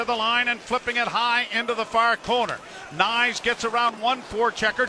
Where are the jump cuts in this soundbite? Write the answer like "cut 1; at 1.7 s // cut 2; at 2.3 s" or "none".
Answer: none